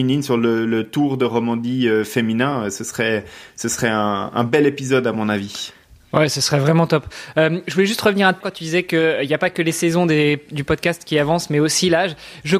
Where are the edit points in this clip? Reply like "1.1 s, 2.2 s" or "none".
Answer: 8.4 s